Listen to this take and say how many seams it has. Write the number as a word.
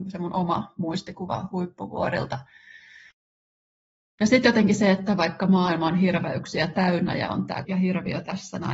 one